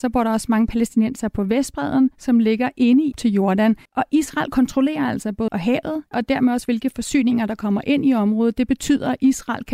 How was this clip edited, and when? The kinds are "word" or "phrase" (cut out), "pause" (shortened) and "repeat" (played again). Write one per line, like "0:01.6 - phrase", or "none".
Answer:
0:03.1 - phrase
0:03.9 - pause
0:05.5 - word
0:06.1 - phrase